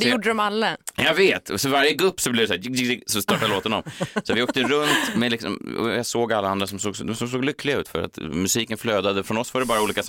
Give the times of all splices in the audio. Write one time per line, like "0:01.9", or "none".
none